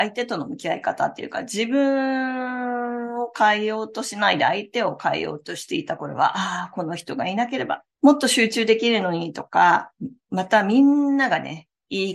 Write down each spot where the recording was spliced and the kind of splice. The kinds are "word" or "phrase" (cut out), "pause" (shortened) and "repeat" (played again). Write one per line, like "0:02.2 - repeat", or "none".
0:07.9 - pause